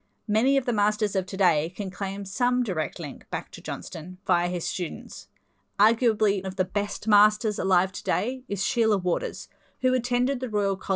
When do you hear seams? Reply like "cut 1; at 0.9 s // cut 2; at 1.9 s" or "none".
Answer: cut 1; at 6.4 s

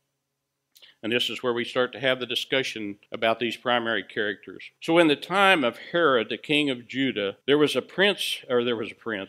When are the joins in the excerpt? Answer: cut 1; at 3.1 s // cut 2; at 4.8 s // cut 3; at 7.4 s

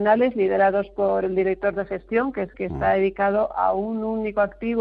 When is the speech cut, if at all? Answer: cut 1; at 2.5 s

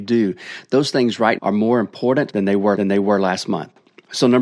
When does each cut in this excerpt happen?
cut 1; at 1.4 s // cut 2; at 2.7 s

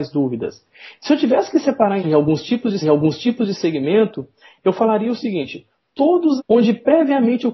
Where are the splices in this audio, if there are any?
cut 1; at 2.0 s // cut 2; at 2.8 s // cut 3; at 6.4 s

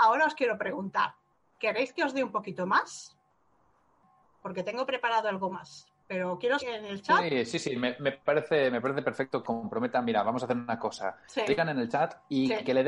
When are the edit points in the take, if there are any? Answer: cut 1; at 6.6 s // cut 2; at 9.4 s // cut 3; at 11.5 s

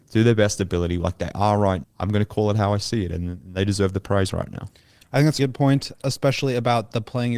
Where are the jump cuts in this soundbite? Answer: cut 1; at 1.8 s // cut 2; at 5.4 s // cut 3; at 5.9 s

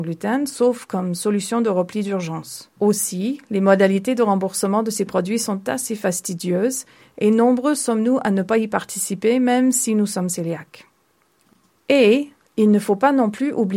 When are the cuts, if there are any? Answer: cut 1; at 2.7 s

